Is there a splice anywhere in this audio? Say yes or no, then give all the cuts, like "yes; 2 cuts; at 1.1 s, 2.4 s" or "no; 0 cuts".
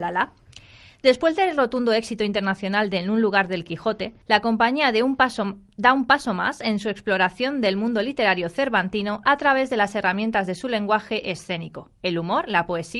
yes; 1 cut; at 4.2 s